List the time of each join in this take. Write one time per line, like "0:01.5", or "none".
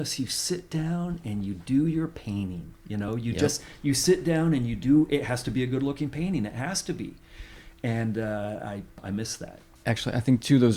none